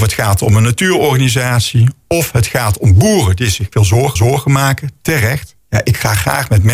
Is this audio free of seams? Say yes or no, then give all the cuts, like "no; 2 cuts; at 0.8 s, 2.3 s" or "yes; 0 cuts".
no; 3 cuts; at 3.7 s, 4.2 s, 5.6 s